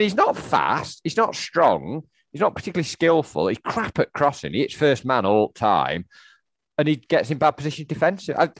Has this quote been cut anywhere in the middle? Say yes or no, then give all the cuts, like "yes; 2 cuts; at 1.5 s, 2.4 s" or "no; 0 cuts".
no; 0 cuts